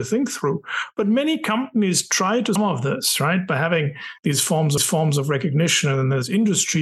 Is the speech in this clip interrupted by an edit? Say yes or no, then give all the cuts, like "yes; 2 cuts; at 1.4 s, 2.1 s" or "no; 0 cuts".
yes; 2 cuts; at 2.6 s, 4.8 s